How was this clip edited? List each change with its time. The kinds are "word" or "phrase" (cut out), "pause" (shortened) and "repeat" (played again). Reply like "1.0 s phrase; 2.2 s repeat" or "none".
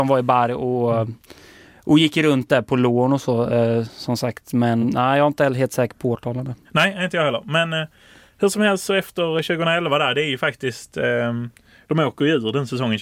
4.8 s word; 6.6 s pause